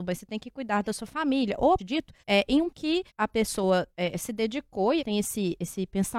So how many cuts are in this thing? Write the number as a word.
five